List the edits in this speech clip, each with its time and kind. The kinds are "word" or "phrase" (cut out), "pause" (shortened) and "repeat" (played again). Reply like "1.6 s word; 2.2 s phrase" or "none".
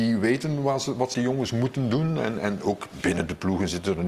1.1 s word